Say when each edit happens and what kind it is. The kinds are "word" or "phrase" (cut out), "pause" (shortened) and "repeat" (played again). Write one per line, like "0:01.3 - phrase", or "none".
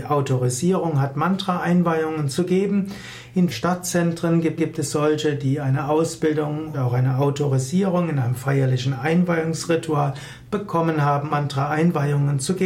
0:03.5 - phrase
0:04.6 - repeat
0:06.7 - word
0:11.3 - word